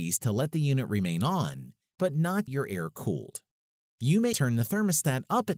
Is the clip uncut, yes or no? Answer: no